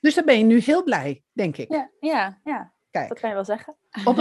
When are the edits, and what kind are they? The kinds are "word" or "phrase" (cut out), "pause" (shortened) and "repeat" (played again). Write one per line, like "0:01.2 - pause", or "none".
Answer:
none

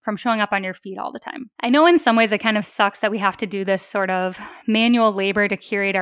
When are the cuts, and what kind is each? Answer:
none

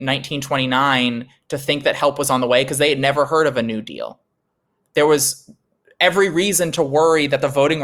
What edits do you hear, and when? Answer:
none

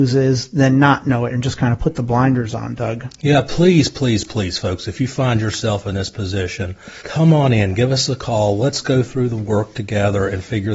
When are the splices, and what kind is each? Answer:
0:07.0 - pause

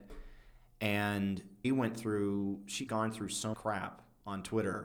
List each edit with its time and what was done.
0:01.6 - word
0:02.9 - word
0:03.5 - word

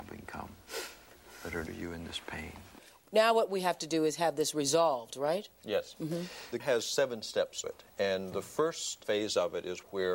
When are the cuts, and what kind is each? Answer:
0:01.7 - word
0:06.6 - word
0:07.6 - word

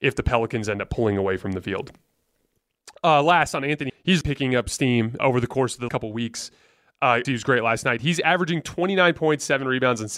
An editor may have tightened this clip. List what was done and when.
0:03.9 - word
0:04.2 - word
0:05.2 - word
0:05.9 - word
0:07.2 - word

